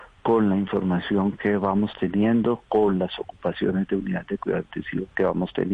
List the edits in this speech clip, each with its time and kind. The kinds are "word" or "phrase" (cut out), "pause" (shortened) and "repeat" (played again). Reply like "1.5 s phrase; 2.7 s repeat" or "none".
none